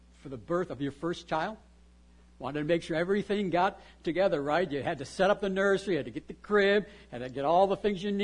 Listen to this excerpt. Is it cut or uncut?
uncut